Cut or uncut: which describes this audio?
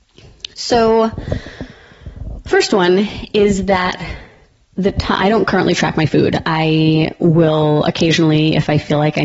uncut